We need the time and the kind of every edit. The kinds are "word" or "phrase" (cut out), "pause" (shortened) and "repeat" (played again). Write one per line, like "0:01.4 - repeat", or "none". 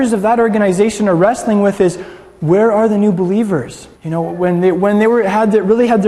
0:03.9 - pause